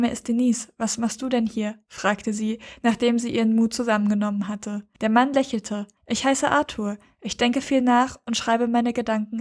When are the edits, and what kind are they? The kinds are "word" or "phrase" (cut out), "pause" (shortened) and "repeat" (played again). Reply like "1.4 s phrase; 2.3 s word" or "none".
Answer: 4.9 s pause; 6.0 s pause